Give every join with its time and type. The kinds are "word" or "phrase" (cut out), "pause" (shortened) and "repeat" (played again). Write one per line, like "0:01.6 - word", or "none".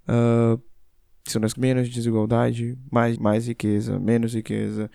0:01.5 - word
0:03.2 - word

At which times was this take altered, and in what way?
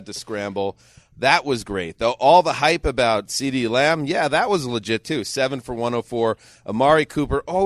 none

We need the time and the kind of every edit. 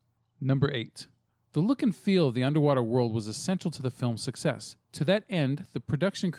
0:04.8 - pause

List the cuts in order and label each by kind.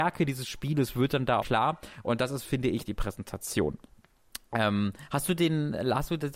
0:01.4 - word
0:02.9 - word

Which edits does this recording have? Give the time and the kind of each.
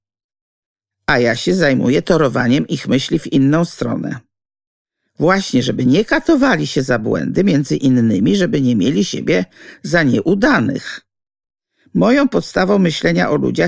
none

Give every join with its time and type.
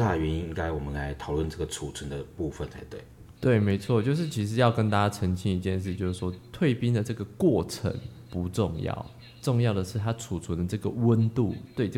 0:03.4 - pause

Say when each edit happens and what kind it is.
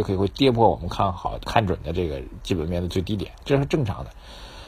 0:01.4 - word

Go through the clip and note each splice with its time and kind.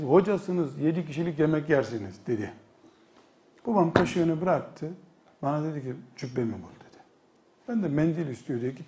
none

